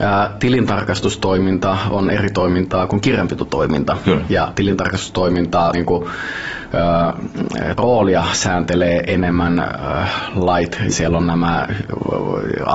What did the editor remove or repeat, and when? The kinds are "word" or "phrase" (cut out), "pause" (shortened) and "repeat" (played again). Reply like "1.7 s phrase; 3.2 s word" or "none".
5.7 s phrase; 7.8 s phrase; 10.9 s word